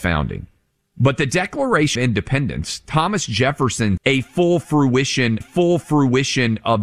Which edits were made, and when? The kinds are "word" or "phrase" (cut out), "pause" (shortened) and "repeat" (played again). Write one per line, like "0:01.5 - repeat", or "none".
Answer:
0:02.0 - word
0:04.0 - word
0:05.4 - repeat